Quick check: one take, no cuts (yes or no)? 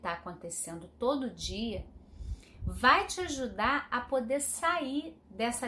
yes